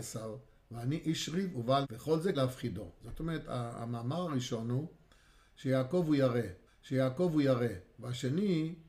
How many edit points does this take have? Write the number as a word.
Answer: three